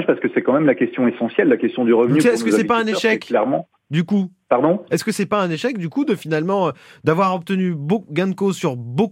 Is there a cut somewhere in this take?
no; 0 cuts

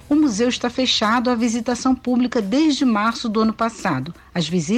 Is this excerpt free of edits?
yes; 0 cuts

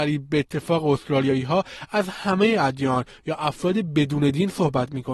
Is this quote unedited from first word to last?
yes; 0 cuts

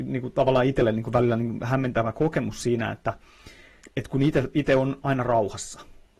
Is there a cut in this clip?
yes; 1 cut; at 3.8 s

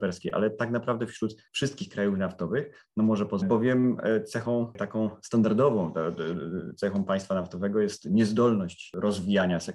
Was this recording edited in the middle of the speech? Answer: yes; 2 cuts; at 1.5 s, 3.4 s

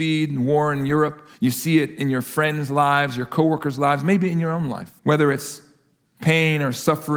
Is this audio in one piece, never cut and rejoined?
no; 2 cuts; at 1.3 s, 5.0 s

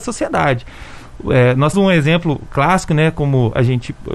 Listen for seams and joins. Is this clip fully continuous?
no; 1 cut; at 1.7 s

